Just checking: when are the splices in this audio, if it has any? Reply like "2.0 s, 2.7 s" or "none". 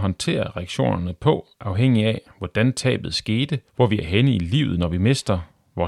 3.7 s